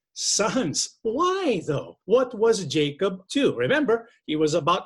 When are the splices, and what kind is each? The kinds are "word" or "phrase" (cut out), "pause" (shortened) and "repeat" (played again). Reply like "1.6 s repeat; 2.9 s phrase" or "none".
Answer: 2.0 s pause; 3.3 s word

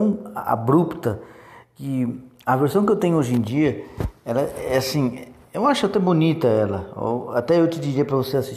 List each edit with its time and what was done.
none

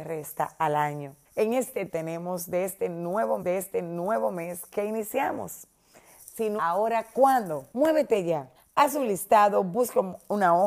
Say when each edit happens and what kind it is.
1.2 s pause; 1.9 s phrase; 3.4 s repeat; 6.6 s word; 7.7 s pause; 8.5 s pause

